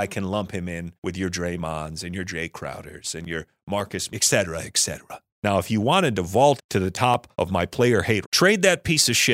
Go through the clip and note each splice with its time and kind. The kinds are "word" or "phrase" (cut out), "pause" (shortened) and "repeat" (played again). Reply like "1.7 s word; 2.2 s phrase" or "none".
1.0 s pause; 4.1 s word; 5.3 s pause; 6.6 s word; 7.3 s pause; 8.2 s word

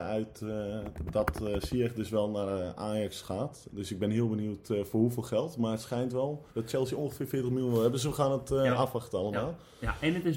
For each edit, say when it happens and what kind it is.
6.5 s pause

